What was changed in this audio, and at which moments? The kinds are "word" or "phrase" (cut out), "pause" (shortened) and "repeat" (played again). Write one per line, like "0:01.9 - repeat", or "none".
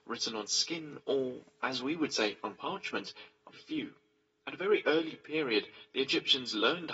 0:03.5 - word

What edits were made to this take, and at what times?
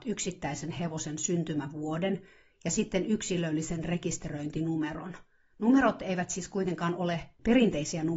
none

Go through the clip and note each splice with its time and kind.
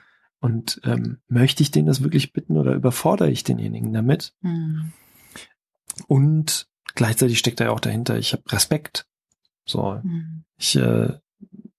none

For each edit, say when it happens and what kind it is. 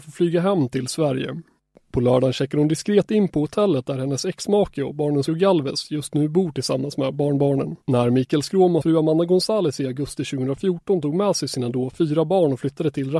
0:05.3 - phrase
0:07.8 - pause
0:08.8 - word

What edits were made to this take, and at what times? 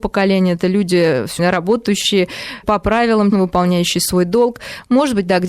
0:01.4 - word
0:02.6 - word
0:03.3 - word

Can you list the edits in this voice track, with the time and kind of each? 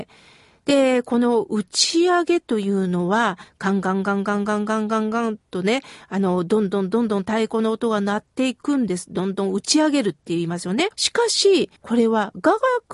0:10.9 - pause
0:11.8 - pause

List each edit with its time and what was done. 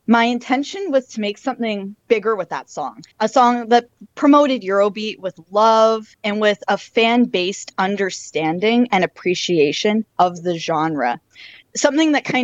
0:02.0 - pause
0:03.1 - pause
0:06.1 - pause
0:10.1 - pause

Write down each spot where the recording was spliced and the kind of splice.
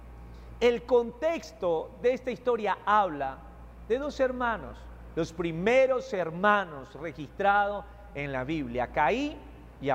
none

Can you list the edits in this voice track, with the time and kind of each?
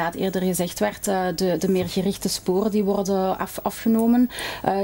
none

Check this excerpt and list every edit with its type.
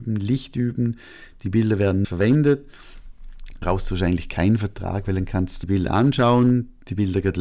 0:02.0 - word
0:03.6 - phrase
0:05.6 - phrase

